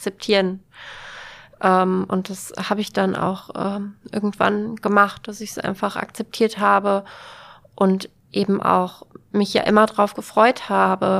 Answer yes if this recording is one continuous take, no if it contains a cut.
yes